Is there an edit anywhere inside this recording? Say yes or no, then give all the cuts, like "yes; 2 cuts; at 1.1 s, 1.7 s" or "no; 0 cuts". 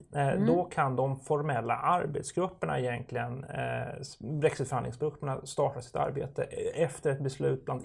no; 0 cuts